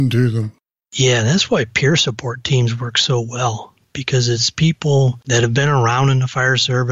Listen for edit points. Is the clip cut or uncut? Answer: uncut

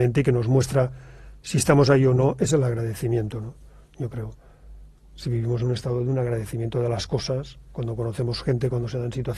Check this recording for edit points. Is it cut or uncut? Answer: uncut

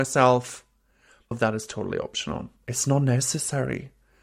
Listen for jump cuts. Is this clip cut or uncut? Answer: cut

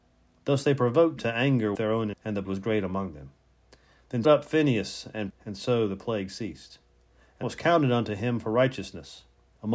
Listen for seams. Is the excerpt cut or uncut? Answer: cut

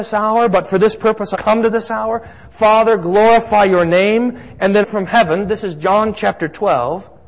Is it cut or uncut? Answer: cut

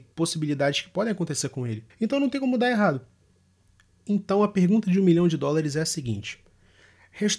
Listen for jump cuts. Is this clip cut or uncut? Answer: cut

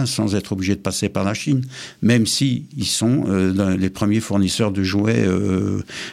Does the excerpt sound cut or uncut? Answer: uncut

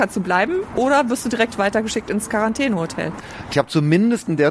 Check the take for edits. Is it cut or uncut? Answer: uncut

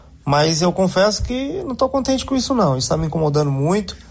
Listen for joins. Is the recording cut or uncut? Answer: uncut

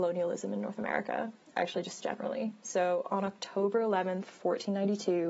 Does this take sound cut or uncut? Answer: cut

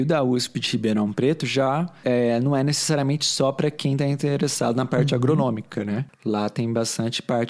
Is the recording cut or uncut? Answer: uncut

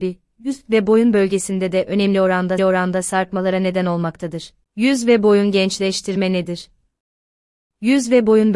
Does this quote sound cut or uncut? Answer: cut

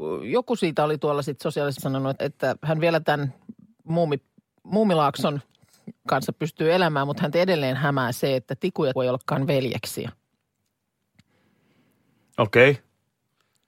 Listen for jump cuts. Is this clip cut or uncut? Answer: cut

